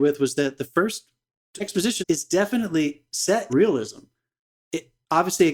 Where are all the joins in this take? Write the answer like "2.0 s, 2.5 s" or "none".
1.6 s, 2.0 s, 3.5 s